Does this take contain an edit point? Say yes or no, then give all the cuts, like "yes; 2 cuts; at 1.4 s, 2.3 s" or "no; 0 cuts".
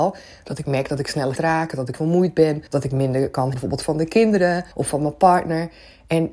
yes; 5 cuts; at 1.4 s, 1.9 s, 2.7 s, 3.5 s, 4.7 s